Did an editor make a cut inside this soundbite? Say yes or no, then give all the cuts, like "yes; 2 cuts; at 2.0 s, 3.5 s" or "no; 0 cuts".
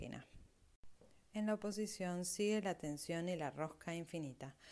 no; 0 cuts